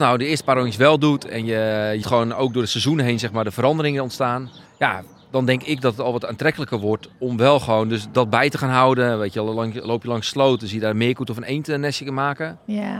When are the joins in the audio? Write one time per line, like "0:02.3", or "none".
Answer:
0:02.0
0:04.6
0:08.1